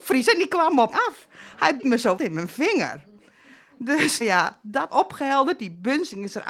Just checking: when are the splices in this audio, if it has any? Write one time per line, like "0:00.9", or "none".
0:00.9
0:01.8
0:02.2
0:04.2
0:04.9